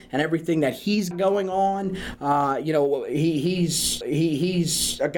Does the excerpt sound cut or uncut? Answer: cut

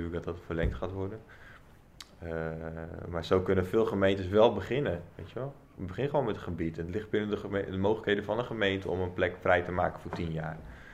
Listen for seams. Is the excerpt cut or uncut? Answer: cut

